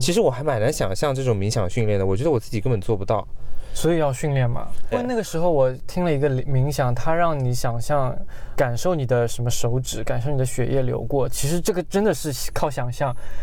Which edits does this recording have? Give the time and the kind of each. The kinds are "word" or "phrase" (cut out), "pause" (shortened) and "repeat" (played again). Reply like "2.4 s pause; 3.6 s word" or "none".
4.9 s word; 8.5 s word